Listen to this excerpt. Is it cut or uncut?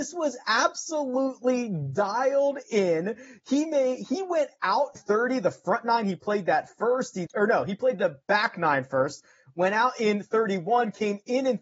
cut